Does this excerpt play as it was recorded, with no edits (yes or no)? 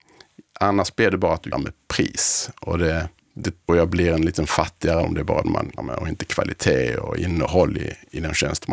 no